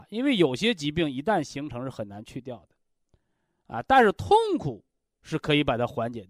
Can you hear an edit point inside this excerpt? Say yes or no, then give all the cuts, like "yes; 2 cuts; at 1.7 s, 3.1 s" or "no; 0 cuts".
no; 0 cuts